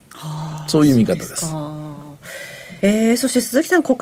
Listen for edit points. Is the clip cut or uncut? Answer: cut